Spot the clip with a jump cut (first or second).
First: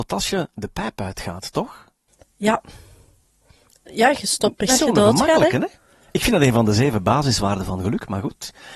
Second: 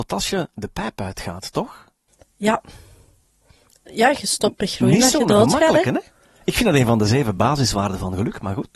first